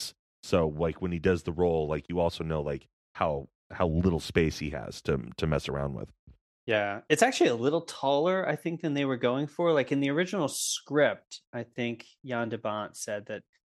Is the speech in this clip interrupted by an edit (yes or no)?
no